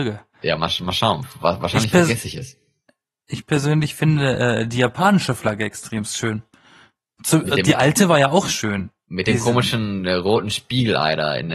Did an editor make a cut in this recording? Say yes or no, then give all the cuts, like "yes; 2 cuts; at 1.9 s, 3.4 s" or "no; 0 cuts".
no; 0 cuts